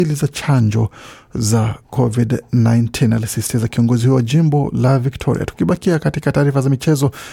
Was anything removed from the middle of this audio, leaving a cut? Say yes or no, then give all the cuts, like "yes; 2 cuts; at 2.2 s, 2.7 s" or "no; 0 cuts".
yes; 1 cut; at 1.8 s